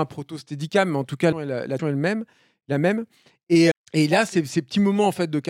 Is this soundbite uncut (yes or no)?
no